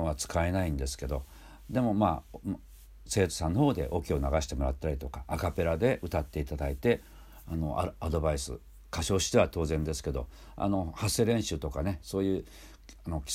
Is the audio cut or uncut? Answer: uncut